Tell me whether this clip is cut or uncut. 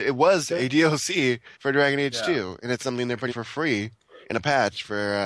cut